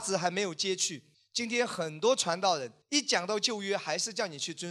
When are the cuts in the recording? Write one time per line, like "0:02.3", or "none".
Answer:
0:01.1
0:02.8